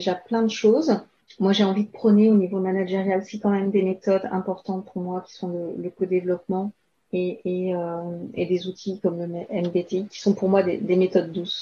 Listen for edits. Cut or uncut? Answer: uncut